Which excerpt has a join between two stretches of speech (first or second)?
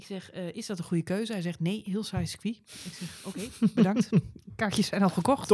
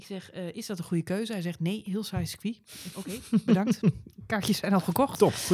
second